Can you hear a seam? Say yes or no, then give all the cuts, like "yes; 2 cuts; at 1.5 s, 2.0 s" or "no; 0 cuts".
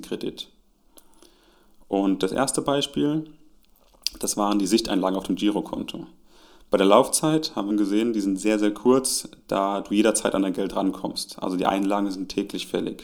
yes; 1 cut; at 7.7 s